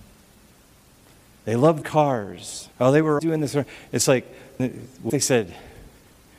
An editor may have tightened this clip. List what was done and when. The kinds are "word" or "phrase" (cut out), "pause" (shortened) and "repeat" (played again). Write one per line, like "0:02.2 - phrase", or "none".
0:01.8 - word
0:02.7 - pause
0:03.2 - word
0:04.6 - word
0:05.1 - word